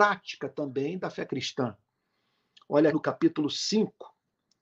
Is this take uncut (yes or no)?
no